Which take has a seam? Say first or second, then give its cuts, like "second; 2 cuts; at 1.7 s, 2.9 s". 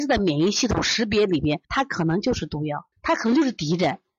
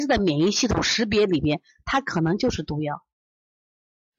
first; 2 cuts; at 1.6 s, 2.9 s